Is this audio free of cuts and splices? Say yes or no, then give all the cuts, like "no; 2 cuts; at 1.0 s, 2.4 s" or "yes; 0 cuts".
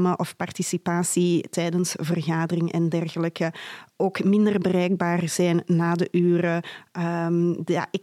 yes; 0 cuts